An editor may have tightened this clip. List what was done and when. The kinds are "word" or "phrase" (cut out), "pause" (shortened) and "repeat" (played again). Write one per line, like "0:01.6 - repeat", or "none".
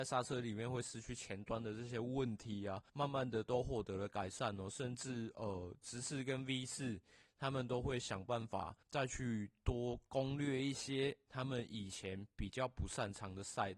0:02.9 - pause
0:08.8 - pause